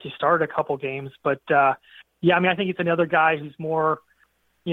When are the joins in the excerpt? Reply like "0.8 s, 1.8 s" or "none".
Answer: none